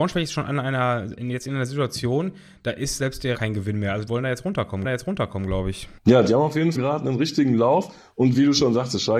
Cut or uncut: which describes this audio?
cut